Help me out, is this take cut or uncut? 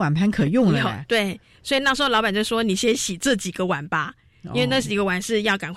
uncut